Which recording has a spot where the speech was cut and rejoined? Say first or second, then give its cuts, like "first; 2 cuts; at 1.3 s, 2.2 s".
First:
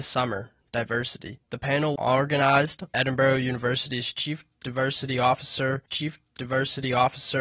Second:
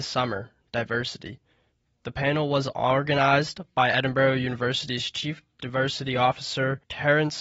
first; 4 cuts; at 1.4 s, 2.0 s, 2.9 s, 5.9 s